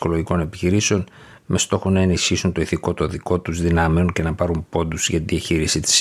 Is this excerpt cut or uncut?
uncut